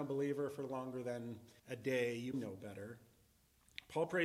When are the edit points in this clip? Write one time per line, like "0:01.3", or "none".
0:01.6
0:02.3